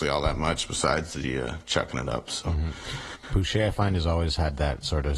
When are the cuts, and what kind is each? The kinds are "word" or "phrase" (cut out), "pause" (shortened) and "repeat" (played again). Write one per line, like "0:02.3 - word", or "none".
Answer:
none